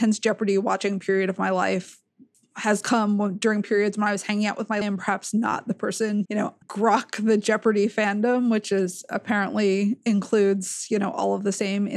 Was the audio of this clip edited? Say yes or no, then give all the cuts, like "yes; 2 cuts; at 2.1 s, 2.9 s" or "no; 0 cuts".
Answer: yes; 3 cuts; at 4.8 s, 6.3 s, 6.6 s